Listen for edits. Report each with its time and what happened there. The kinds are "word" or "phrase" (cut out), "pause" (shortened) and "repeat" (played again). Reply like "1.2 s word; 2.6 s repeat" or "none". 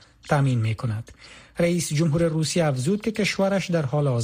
none